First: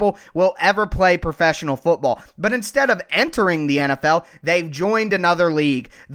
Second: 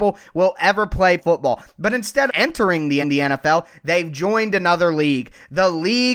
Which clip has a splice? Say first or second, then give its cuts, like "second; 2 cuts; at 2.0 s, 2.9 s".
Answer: second; 3 cuts; at 1.2 s, 2.3 s, 3.0 s